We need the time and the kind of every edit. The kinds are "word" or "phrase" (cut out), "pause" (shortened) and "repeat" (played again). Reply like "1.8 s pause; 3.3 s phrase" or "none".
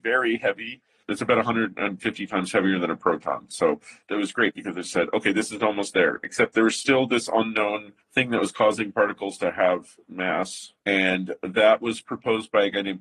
8.0 s pause